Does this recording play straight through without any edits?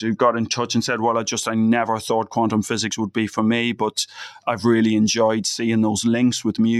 yes; 0 cuts

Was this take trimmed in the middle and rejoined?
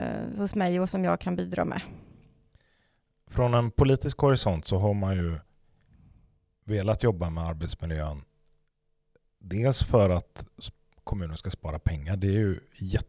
no; 0 cuts

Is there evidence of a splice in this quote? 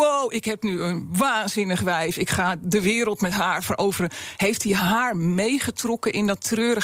no; 0 cuts

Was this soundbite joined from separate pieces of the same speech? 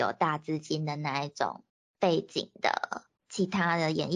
yes; 2 cuts; at 1.7 s, 3.2 s

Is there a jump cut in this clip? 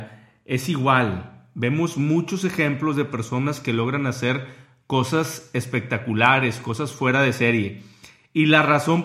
no; 0 cuts

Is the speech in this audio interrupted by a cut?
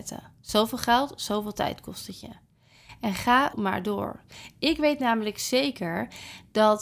yes; 1 cut; at 3.5 s

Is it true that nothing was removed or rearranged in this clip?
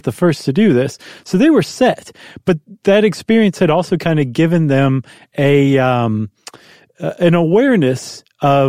yes; 0 cuts

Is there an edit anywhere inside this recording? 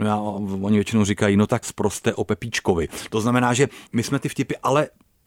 yes; 2 cuts; at 1.6 s, 3.9 s

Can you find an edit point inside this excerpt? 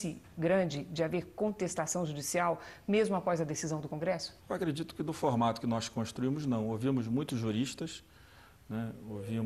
yes; 1 cut; at 4.4 s

